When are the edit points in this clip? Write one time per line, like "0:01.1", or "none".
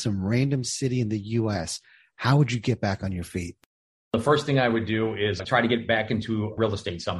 none